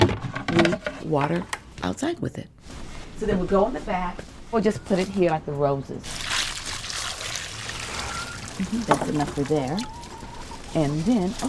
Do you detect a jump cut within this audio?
no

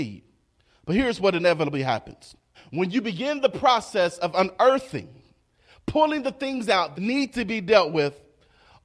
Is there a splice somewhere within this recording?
yes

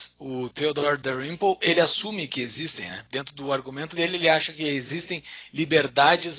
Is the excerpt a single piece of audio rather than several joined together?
yes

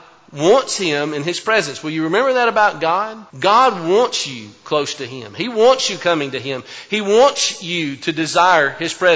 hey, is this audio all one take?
no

